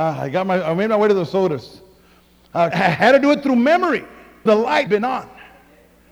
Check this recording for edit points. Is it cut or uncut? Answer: cut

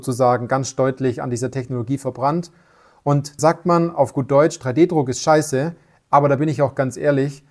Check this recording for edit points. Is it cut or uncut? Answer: cut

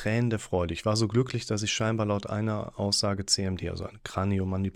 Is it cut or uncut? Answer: uncut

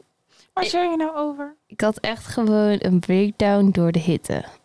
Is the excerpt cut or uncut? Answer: uncut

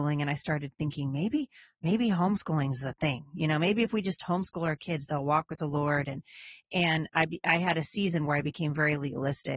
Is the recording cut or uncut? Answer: uncut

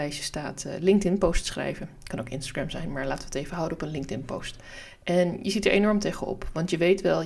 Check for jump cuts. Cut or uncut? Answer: uncut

